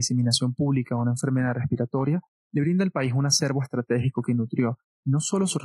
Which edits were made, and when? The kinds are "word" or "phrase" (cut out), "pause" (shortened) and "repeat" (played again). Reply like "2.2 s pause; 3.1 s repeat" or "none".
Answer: none